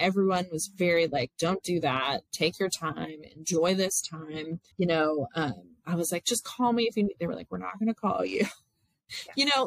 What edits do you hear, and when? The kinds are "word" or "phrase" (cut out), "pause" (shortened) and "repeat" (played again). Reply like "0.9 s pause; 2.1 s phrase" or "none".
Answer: 1.3 s pause; 2.3 s pause; 4.7 s pause